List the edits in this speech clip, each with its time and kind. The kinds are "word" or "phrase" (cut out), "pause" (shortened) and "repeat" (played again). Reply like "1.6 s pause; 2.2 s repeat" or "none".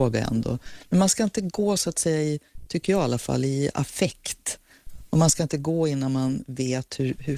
none